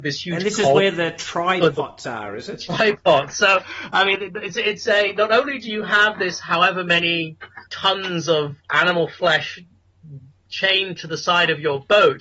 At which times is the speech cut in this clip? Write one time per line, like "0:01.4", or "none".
0:07.7
0:08.6